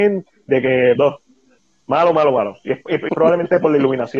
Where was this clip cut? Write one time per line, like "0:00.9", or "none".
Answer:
0:01.0
0:01.6
0:03.1